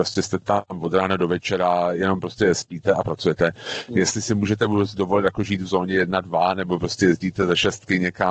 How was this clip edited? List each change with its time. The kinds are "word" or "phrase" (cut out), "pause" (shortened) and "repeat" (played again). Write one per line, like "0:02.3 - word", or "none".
none

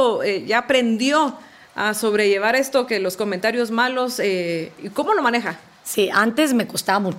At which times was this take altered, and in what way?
none

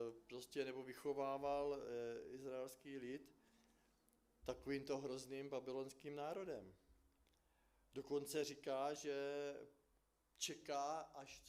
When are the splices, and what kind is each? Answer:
none

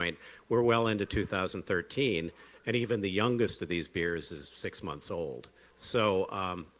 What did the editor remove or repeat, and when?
0:05.6 - pause

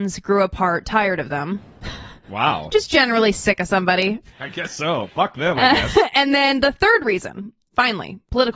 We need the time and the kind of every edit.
none

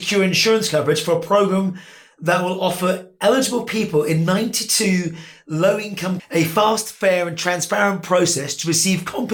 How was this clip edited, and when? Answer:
0:06.2 - word

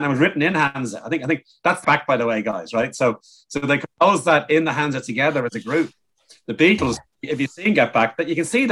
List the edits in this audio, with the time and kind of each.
0:01.8 - word

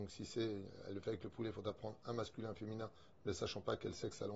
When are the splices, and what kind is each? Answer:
none

